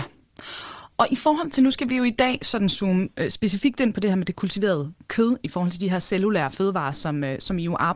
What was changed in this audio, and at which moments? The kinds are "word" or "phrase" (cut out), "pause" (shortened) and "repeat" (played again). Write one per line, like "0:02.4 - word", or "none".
none